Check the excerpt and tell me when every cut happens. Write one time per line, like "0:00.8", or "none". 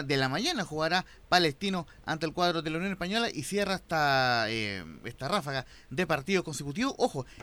none